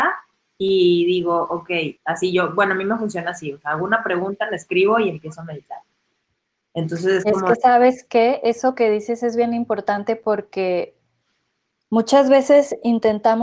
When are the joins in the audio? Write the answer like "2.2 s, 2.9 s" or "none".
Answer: 2.0 s

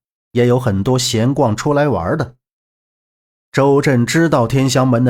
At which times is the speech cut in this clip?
none

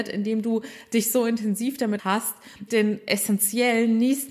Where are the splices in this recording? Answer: 2.0 s, 2.7 s

